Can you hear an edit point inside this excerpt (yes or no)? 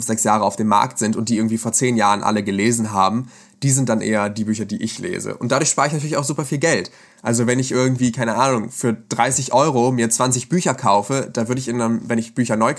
no